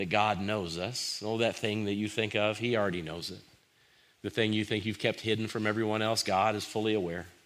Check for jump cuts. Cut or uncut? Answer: uncut